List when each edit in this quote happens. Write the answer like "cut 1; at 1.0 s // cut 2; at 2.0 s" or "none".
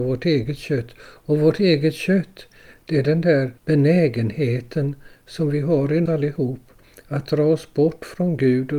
cut 1; at 3.6 s // cut 2; at 6.1 s